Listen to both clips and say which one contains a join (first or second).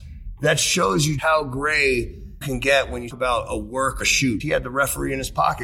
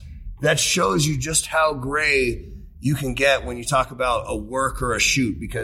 first